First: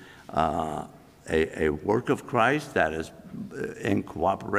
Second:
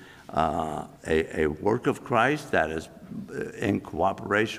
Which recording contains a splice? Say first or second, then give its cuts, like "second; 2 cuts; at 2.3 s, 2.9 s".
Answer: second; 1 cut; at 1.0 s